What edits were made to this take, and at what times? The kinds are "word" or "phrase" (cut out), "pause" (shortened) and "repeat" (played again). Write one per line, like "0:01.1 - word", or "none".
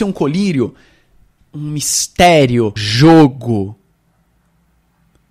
0:02.8 - word